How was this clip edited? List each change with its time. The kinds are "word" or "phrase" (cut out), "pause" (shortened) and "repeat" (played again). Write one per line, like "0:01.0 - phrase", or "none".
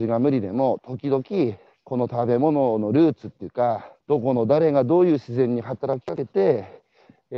0:01.7 - pause
0:04.0 - pause